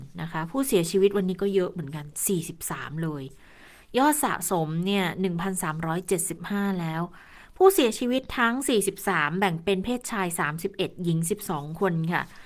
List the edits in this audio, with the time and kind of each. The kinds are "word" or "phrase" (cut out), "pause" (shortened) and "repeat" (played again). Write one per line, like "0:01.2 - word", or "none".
none